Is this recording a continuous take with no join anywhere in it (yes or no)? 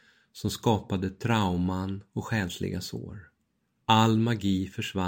yes